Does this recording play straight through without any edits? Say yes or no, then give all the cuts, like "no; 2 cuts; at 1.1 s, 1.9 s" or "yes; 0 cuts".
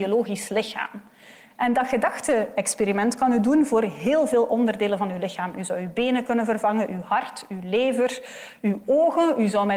yes; 0 cuts